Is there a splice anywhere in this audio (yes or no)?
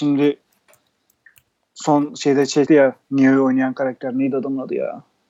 yes